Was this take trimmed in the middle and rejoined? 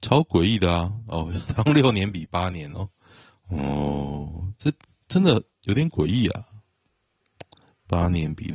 no; 0 cuts

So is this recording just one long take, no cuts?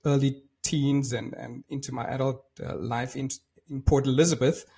yes; 0 cuts

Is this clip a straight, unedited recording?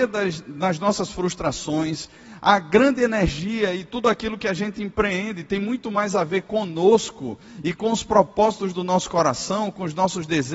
yes; 0 cuts

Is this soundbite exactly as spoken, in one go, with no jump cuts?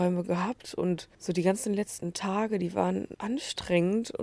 no; 2 cuts; at 1.1 s, 3.1 s

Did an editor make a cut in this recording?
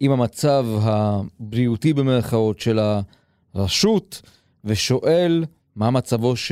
no; 0 cuts

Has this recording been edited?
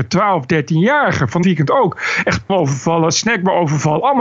yes; 2 cuts; at 1.4 s, 2.5 s

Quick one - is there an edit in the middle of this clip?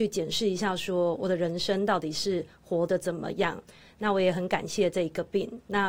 no; 0 cuts

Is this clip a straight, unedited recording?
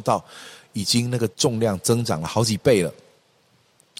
no; 1 cut; at 1.3 s

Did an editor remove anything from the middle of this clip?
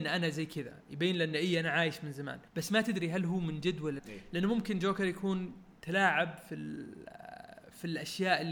yes; 3 cuts; at 2.5 s, 4.0 s, 5.8 s

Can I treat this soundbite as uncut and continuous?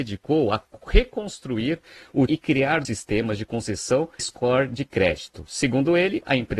no; 3 cuts; at 2.3 s, 2.8 s, 4.2 s

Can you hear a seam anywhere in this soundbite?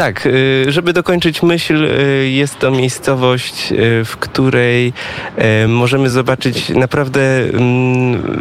no; 0 cuts

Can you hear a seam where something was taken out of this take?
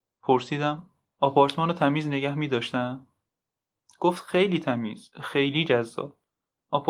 no; 0 cuts

